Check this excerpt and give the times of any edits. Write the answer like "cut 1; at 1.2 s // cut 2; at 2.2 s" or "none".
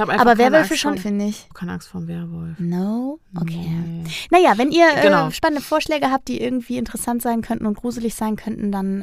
cut 1; at 1.0 s // cut 2; at 1.5 s